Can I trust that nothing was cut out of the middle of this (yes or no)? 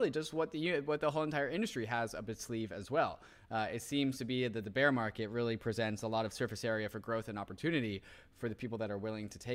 yes